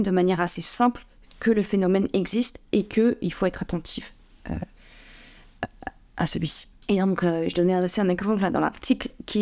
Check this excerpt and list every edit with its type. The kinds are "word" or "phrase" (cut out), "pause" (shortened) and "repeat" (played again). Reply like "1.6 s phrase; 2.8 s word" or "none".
none